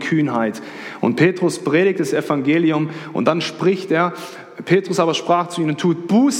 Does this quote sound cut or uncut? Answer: uncut